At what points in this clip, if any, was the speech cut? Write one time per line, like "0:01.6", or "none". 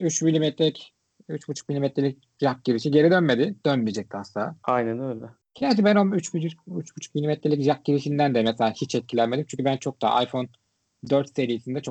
none